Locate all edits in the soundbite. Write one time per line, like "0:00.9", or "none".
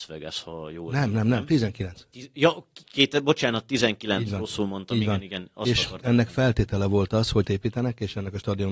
0:07.4